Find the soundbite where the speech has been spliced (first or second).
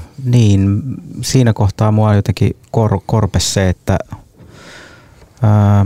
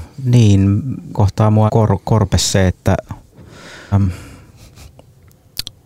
second